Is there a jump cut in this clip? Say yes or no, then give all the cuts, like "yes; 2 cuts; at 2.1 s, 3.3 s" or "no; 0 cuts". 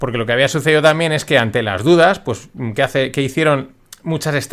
no; 0 cuts